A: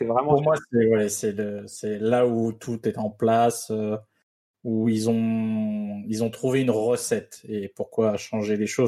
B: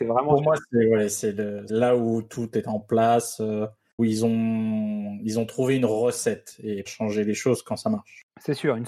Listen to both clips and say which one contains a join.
B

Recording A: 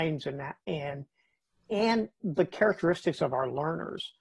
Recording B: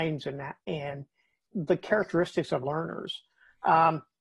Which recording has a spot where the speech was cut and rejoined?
B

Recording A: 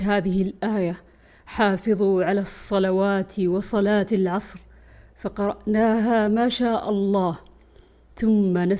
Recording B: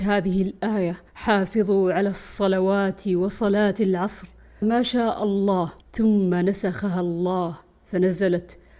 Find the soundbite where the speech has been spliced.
B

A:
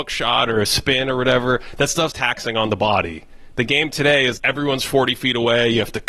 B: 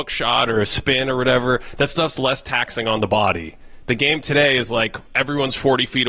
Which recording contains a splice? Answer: A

